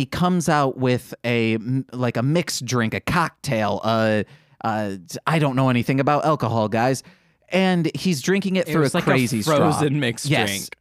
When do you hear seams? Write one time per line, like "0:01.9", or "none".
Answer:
none